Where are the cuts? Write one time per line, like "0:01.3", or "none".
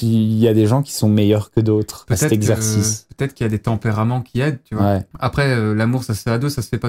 none